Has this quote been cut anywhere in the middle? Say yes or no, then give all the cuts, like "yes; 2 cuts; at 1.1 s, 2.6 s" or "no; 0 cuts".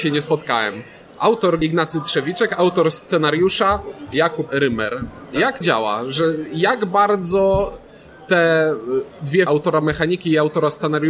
yes; 4 cuts; at 1.6 s, 4.5 s, 5.6 s, 9.5 s